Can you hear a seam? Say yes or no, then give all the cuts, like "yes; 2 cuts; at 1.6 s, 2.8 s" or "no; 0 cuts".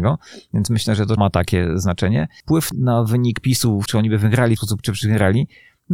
yes; 4 cuts; at 1.2 s, 2.7 s, 3.9 s, 4.6 s